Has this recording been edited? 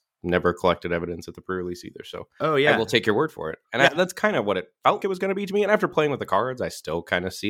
yes; 1 cut; at 5.0 s

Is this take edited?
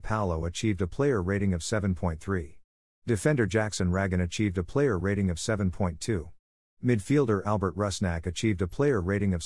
no; 0 cuts

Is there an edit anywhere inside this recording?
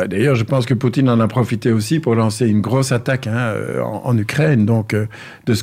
no; 0 cuts

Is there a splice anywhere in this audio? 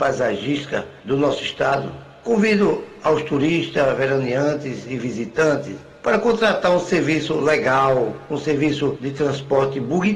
no; 0 cuts

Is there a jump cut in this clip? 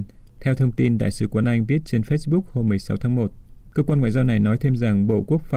no; 0 cuts

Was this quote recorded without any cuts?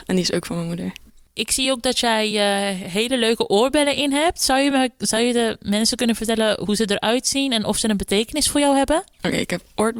yes; 0 cuts

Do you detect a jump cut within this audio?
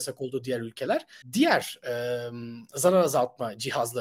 yes; 1 cut; at 1.2 s

